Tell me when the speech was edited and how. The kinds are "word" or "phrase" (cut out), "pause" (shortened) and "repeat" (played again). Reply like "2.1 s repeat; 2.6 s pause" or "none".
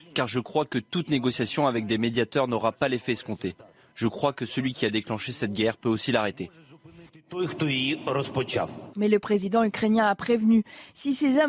none

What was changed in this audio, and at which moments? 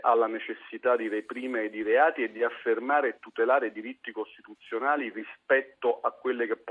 none

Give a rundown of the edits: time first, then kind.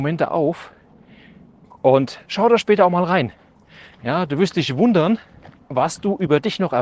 5.6 s pause

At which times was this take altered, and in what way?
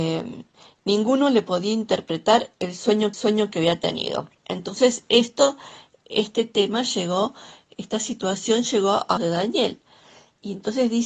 3.1 s repeat; 4.4 s pause; 9.2 s word

